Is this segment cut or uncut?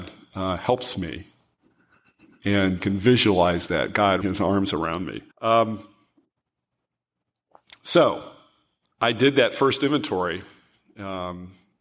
cut